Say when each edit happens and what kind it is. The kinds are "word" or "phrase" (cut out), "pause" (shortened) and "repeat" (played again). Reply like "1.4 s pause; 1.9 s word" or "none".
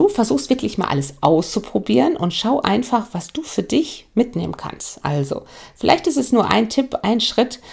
none